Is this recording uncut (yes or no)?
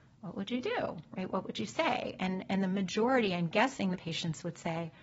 no